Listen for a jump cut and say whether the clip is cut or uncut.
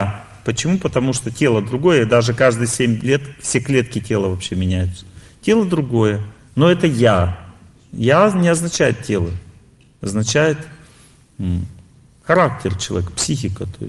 uncut